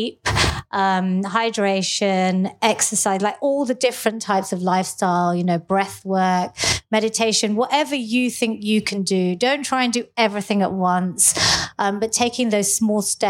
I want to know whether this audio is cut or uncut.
uncut